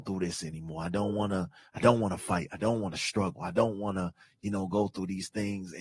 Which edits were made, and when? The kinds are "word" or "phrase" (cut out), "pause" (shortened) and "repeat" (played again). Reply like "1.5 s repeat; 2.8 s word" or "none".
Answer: none